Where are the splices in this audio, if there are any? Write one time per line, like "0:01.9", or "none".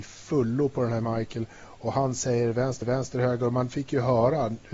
0:02.8